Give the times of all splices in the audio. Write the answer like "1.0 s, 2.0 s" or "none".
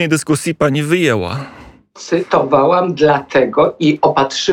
none

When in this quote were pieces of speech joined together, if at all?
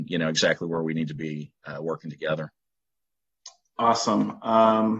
none

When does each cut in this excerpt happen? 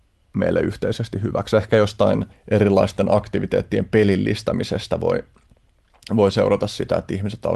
2.3 s

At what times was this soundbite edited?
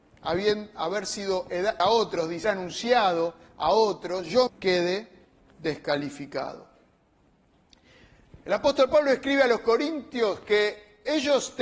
1.8 s, 2.4 s, 4.5 s

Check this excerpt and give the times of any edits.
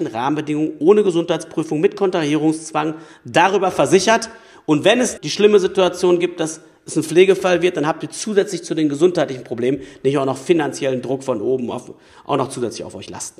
5.2 s

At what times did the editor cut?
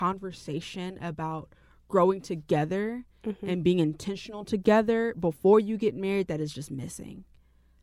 none

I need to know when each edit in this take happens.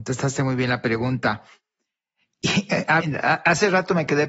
3.0 s

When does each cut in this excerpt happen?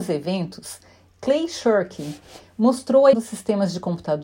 3.1 s

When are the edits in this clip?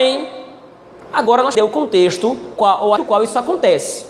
1.6 s, 2.6 s, 3.0 s

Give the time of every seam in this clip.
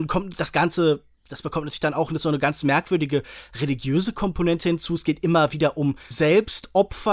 6.1 s

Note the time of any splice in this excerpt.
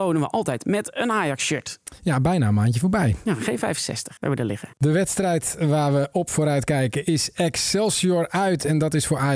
4.2 s, 4.7 s

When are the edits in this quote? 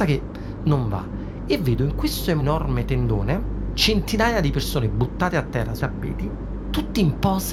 5.8 s

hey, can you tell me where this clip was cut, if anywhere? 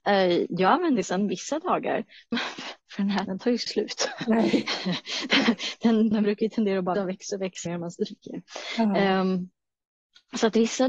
1.0 s, 2.3 s, 3.3 s, 3.7 s, 6.1 s, 7.0 s, 7.7 s

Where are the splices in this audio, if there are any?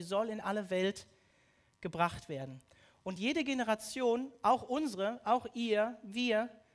none

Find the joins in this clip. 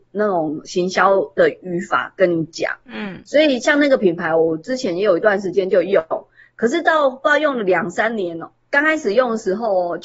none

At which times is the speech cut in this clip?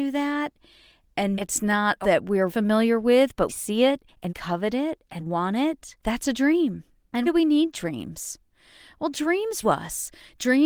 1.3 s, 2.0 s, 2.5 s, 3.5 s, 4.3 s, 5.2 s, 7.2 s, 9.6 s

